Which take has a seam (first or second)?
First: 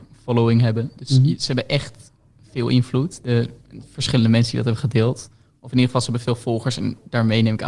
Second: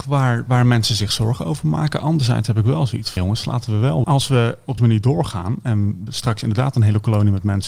second